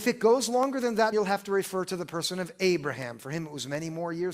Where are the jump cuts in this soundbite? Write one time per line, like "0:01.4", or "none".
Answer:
0:01.1

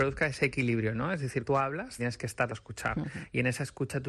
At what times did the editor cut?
0:01.5
0:02.0
0:02.5

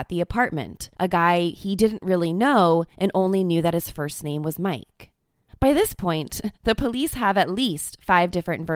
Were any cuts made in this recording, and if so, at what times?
0:00.9
0:02.9
0:05.5

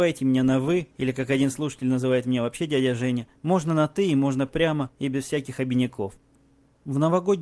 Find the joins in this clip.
0:03.4

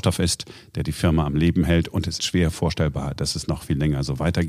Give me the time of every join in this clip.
0:02.2

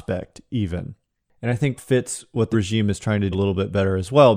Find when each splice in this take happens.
0:01.8
0:02.5
0:03.3

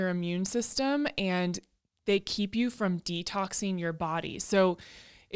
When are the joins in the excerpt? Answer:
none

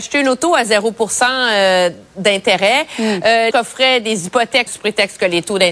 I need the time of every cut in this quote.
0:03.5
0:04.7

